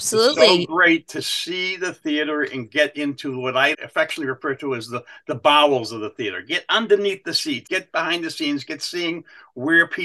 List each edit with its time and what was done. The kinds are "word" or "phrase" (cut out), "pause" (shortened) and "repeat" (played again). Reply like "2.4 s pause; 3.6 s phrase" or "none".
3.7 s word; 7.7 s word